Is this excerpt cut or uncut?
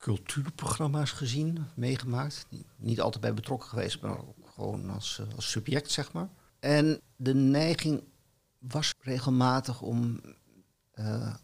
cut